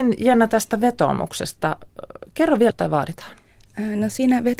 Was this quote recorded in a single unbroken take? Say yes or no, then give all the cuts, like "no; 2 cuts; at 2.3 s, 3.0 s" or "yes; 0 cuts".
no; 1 cut; at 2.7 s